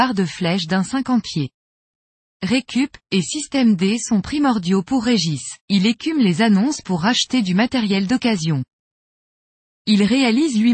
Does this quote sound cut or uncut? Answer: cut